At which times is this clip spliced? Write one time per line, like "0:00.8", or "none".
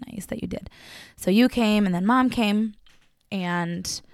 none